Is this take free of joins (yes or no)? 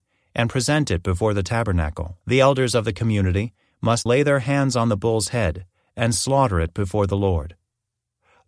no